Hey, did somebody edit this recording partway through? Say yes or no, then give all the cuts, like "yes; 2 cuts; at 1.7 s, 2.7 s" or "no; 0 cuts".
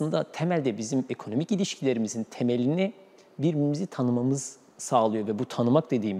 no; 0 cuts